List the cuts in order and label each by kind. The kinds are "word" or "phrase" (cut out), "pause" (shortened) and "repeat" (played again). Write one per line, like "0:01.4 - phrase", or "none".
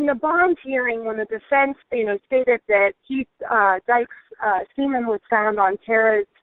0:01.8 - pause
0:03.0 - pause